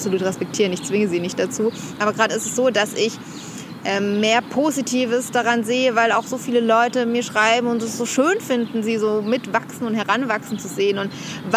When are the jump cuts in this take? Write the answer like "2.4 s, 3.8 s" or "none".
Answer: 2.3 s

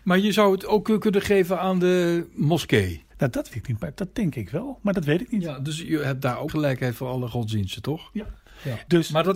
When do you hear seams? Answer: 3.1 s, 3.5 s, 6.5 s

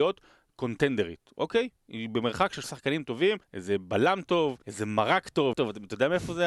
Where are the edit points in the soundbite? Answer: 1.8 s, 2.6 s, 3.4 s, 4.6 s, 5.5 s

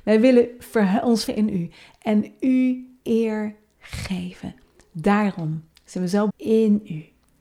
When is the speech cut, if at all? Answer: 1.3 s, 3.0 s, 5.7 s, 6.3 s

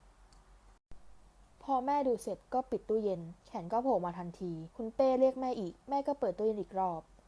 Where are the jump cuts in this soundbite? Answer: 1.5 s, 4.7 s

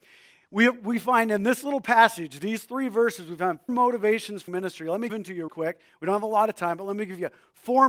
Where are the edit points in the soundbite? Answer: 3.7 s, 4.5 s, 5.1 s, 5.5 s

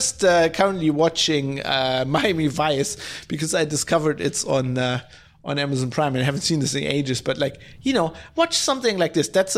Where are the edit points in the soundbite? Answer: none

